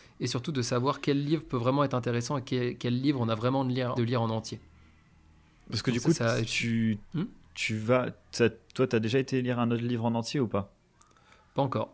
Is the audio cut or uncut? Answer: cut